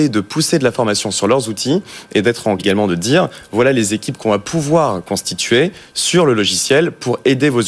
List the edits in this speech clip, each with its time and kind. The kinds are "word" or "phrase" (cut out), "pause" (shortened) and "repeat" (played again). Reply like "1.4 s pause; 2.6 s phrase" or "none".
2.6 s word